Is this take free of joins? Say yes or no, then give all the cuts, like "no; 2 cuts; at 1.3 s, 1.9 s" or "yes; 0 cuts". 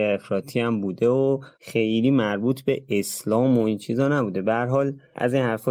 no; 1 cut; at 1.5 s